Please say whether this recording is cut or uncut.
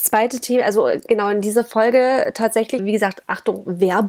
cut